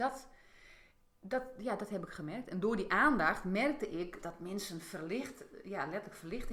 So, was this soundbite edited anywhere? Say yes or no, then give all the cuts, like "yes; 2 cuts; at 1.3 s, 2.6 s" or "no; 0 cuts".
yes; 1 cut; at 4.2 s